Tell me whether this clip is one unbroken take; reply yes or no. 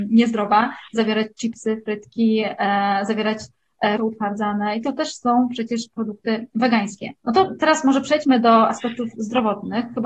no